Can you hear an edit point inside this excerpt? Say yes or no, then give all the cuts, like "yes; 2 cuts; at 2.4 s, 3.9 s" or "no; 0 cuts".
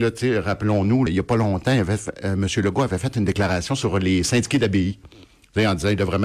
yes; 1 cut; at 1.1 s